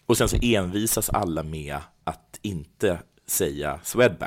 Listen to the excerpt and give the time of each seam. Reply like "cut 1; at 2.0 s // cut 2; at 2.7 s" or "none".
none